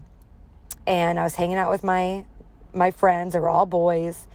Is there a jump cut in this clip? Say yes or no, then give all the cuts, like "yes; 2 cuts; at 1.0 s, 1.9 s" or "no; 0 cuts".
no; 0 cuts